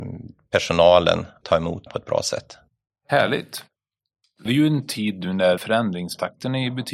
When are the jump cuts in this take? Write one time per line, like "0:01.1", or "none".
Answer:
0:01.4
0:01.9
0:04.5
0:05.6